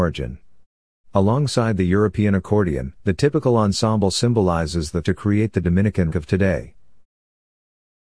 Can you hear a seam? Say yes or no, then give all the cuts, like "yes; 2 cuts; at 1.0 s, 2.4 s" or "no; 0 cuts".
yes; 3 cuts; at 3.0 s, 5.0 s, 6.1 s